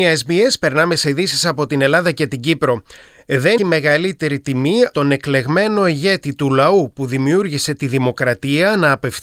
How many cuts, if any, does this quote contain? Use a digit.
2